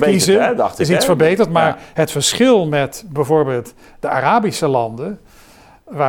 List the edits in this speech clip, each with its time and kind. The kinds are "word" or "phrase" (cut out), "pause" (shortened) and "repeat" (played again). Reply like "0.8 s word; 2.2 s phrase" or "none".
none